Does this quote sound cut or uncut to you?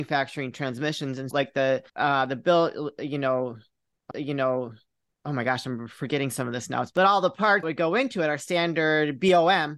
cut